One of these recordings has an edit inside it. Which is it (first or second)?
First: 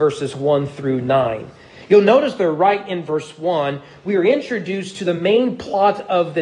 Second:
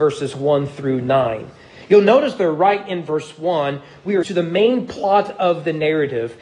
second